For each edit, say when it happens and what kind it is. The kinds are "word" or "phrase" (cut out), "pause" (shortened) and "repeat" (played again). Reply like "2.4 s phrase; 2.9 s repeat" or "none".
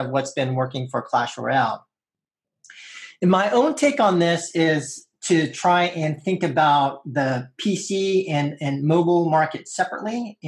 none